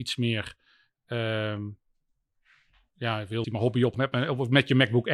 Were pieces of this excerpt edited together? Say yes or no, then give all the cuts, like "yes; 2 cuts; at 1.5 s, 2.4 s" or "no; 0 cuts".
yes; 2 cuts; at 3.4 s, 3.9 s